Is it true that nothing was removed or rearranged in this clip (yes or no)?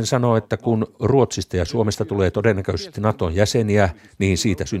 yes